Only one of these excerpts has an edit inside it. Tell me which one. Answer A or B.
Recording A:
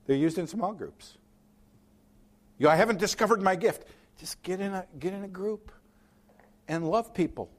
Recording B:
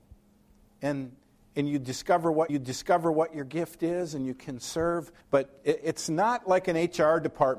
B